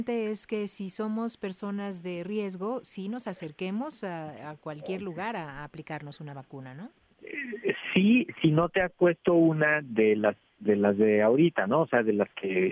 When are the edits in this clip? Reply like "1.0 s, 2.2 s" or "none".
none